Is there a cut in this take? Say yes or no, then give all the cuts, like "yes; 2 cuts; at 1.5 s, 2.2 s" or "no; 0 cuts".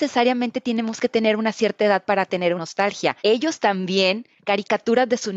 yes; 2 cuts; at 2.6 s, 3.2 s